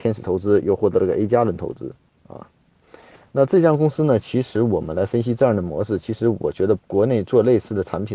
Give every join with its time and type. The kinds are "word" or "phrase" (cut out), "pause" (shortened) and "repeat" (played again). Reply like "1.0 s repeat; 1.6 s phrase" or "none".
6.8 s pause